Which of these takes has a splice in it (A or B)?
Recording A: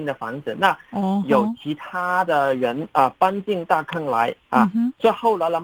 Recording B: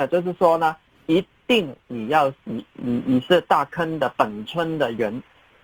B